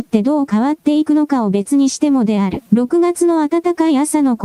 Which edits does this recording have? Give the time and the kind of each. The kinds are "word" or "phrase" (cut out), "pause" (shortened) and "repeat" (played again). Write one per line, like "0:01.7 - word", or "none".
0:02.7 - pause